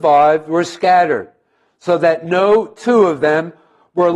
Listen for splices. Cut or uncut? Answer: uncut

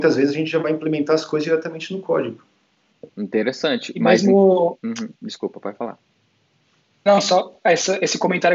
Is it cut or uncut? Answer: cut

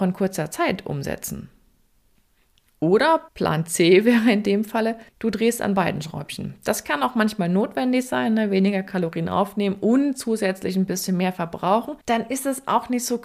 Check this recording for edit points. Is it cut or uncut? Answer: cut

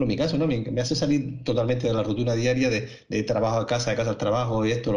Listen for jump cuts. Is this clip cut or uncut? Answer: uncut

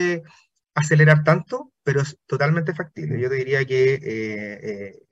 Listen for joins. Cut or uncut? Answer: uncut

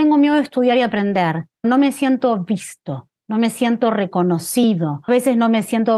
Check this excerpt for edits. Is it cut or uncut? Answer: cut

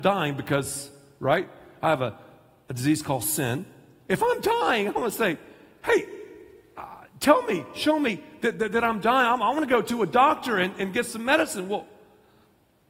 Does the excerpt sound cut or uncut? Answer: uncut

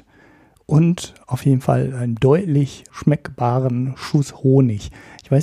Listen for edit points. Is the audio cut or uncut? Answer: uncut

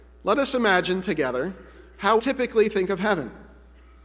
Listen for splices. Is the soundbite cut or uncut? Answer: cut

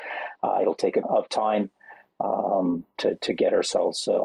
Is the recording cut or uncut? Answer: cut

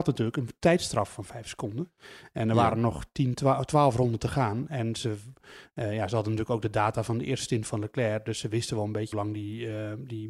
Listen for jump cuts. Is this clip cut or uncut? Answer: cut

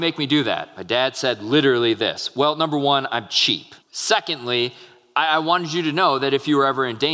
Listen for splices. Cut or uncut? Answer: cut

